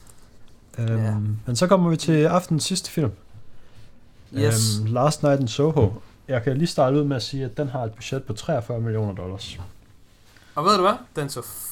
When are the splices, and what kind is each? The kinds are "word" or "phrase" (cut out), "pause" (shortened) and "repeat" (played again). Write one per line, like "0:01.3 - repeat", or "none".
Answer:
none